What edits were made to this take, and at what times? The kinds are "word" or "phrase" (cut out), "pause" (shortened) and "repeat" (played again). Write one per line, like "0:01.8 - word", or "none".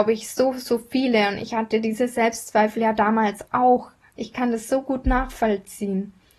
none